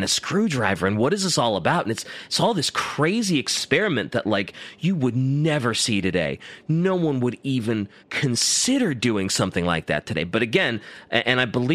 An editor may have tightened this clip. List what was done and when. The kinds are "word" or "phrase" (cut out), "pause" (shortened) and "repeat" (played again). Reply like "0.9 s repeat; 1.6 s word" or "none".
8.0 s pause

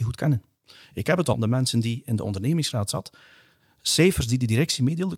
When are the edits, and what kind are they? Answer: 1.3 s phrase

